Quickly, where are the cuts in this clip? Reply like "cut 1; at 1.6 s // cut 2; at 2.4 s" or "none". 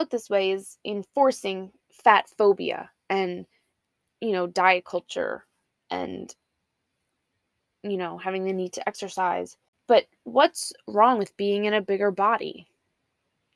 none